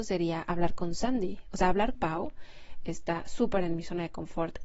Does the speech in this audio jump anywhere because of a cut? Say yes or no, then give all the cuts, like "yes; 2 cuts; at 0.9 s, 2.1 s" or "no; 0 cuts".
yes; 1 cut; at 1.9 s